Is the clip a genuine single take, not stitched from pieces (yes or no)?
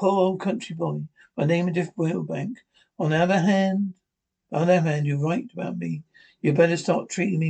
yes